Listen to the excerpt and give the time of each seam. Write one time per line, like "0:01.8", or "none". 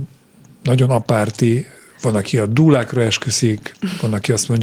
0:01.8